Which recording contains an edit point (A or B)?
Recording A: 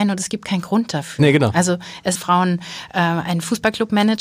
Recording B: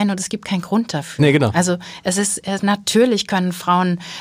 A